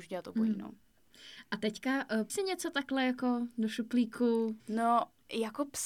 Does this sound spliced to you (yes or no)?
yes